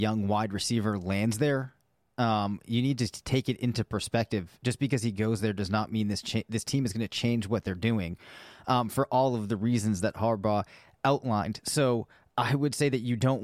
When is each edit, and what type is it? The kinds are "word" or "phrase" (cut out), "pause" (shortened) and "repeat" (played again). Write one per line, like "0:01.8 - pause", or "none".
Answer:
none